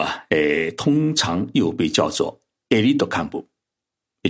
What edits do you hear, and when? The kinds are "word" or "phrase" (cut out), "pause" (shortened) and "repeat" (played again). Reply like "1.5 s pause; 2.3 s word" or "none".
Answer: none